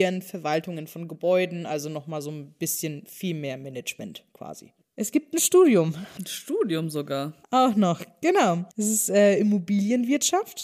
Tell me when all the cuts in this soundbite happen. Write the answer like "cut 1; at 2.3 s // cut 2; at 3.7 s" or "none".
cut 1; at 7.4 s

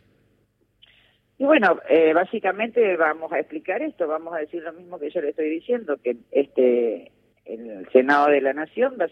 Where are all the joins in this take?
cut 1; at 6.2 s

